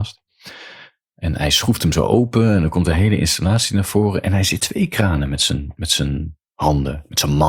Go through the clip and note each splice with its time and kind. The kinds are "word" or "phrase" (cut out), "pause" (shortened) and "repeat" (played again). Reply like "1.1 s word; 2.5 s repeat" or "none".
4.6 s word